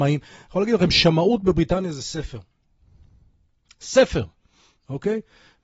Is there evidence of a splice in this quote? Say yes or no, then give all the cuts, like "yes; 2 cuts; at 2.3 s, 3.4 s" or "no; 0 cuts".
no; 0 cuts